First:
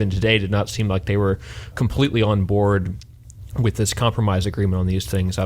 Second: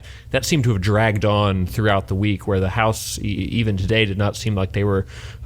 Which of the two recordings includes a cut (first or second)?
first